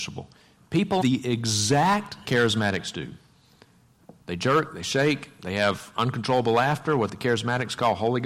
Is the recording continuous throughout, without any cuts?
no; 2 cuts; at 1.0 s, 2.2 s

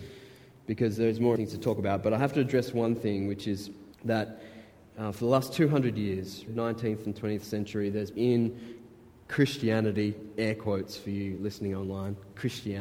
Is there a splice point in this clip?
yes; 4 cuts; at 1.4 s, 3.9 s, 6.5 s, 8.1 s

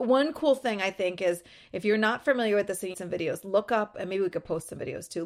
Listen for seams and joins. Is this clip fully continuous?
no; 1 cut; at 2.9 s

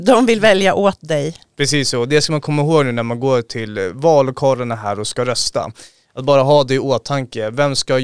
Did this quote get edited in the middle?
no; 0 cuts

